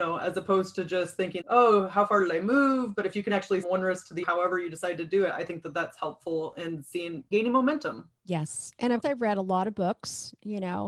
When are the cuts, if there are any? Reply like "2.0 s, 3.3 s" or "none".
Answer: 1.4 s, 3.6 s, 4.2 s, 7.3 s, 8.2 s, 9.0 s